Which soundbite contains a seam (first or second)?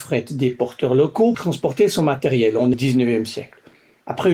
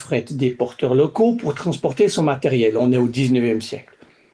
first